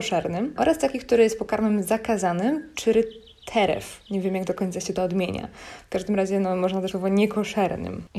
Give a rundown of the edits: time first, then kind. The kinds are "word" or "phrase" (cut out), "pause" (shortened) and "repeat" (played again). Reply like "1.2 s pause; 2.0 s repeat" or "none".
6.9 s word